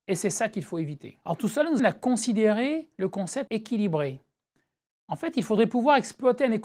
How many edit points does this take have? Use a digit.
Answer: 3